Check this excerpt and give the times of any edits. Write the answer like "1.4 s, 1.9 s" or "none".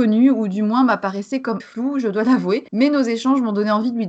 1.6 s, 2.7 s